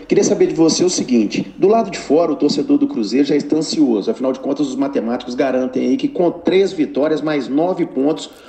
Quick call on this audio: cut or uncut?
uncut